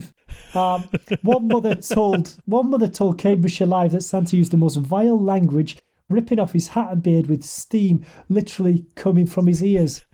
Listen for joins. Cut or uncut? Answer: cut